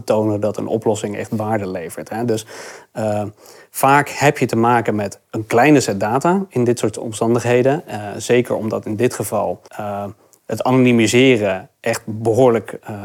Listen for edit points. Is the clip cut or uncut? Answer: cut